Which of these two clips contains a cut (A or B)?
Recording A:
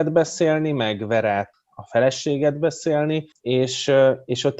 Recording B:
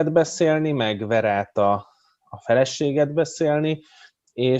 A